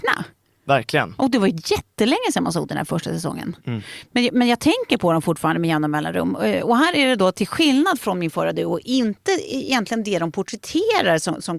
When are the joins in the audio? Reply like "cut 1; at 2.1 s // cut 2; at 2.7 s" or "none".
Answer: none